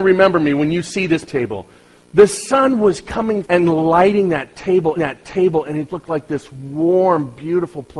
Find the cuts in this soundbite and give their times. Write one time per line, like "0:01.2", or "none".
0:01.3
0:03.4
0:05.0
0:05.9